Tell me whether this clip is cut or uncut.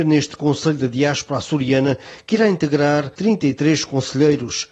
cut